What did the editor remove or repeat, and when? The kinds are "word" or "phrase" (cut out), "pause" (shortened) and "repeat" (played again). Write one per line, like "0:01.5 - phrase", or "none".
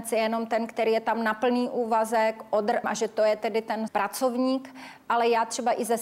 0:02.8 - phrase
0:03.9 - word